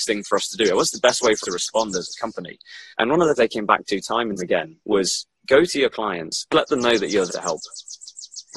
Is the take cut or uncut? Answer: cut